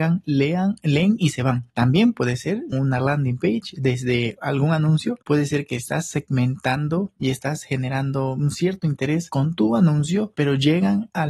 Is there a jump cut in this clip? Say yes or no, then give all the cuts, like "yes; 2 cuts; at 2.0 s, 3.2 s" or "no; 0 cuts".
yes; 3 cuts; at 1.7 s, 2.7 s, 5.2 s